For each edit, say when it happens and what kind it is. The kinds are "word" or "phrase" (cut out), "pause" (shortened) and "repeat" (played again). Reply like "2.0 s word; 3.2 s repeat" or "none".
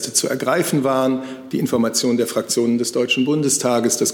none